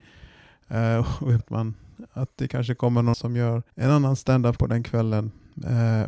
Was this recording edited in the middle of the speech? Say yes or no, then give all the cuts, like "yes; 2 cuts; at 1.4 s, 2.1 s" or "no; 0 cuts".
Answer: yes; 4 cuts; at 1.4 s, 3.1 s, 3.7 s, 4.6 s